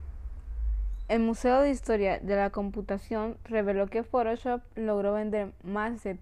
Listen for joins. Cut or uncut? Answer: uncut